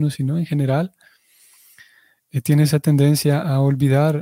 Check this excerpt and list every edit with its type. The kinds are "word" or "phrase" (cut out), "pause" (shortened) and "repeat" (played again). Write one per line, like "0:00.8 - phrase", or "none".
none